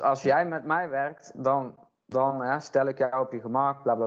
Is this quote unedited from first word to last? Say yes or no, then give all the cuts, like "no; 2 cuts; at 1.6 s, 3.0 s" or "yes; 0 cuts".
yes; 0 cuts